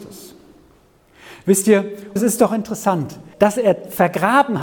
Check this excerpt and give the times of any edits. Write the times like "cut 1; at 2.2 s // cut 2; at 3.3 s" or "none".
cut 1; at 2.2 s // cut 2; at 3.3 s